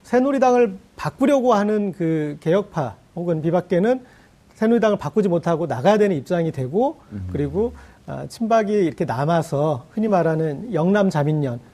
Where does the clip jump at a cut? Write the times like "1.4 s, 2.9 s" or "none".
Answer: none